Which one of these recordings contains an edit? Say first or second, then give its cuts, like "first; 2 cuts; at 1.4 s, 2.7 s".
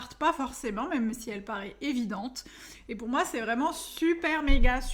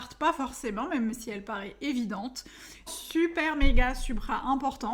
second; 1 cut; at 2.9 s